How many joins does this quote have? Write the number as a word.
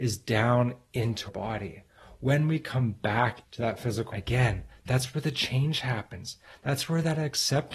three